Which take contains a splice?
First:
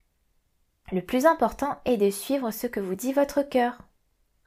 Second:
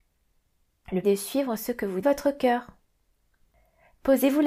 second; 2 cuts; at 1.0 s, 2.0 s

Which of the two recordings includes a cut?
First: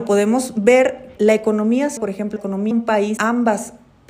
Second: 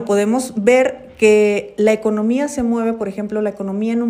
first; 5 cuts; at 1.2 s, 2.0 s, 2.4 s, 2.7 s, 3.2 s

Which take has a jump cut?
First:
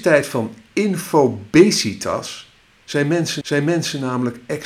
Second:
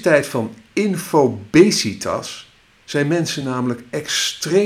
first; 1 cut; at 3.4 s

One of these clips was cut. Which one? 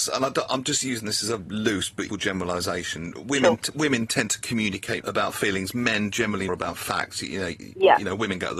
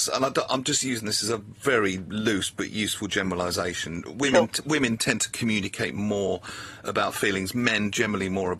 first; 4 cuts; at 1.4 s, 2.1 s, 5.0 s, 6.5 s

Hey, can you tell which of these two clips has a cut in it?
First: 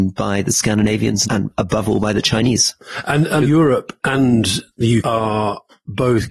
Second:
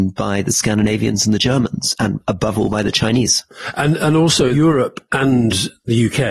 first; 3 cuts; at 1.2 s, 3.4 s, 5.0 s

